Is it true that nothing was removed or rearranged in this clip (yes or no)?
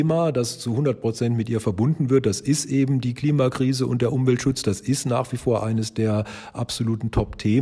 yes